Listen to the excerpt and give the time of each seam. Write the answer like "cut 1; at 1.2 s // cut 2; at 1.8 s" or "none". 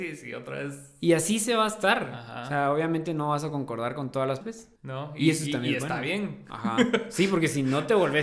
cut 1; at 4.4 s // cut 2; at 4.8 s